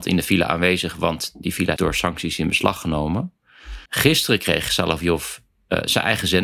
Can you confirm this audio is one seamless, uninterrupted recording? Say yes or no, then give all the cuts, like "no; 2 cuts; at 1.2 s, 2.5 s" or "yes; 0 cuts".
no; 2 cuts; at 1.8 s, 3.9 s